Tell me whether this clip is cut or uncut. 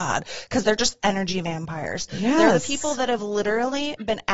uncut